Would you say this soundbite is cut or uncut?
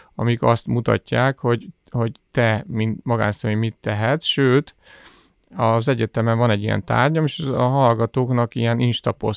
uncut